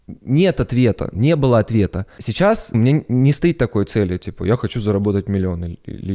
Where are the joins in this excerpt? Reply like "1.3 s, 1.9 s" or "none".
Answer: 1.1 s, 2.7 s